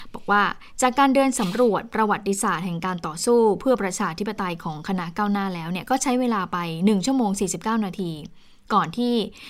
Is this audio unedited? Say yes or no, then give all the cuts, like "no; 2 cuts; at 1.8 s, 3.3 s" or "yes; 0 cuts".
yes; 0 cuts